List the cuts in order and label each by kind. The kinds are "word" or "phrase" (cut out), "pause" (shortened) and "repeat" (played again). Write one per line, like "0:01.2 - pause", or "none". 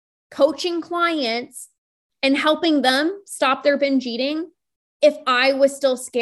none